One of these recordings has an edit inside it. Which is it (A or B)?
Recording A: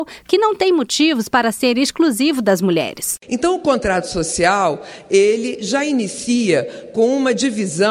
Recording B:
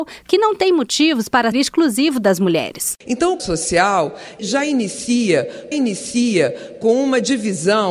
B